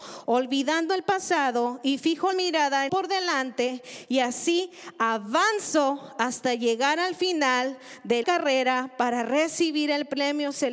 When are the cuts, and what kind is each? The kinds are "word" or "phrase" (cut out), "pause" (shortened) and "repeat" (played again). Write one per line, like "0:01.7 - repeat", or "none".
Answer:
0:02.3 - word
0:02.9 - phrase
0:08.2 - word